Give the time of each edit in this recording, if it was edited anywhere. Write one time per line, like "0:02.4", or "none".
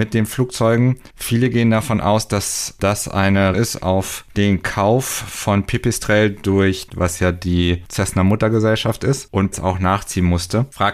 0:01.1
0:03.5
0:06.9
0:09.5